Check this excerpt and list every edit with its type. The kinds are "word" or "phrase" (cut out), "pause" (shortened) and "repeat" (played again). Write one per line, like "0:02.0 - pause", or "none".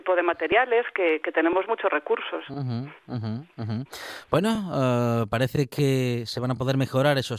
none